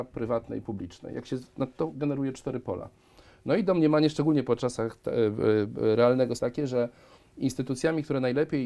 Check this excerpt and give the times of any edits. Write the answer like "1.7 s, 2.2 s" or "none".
1.7 s, 6.4 s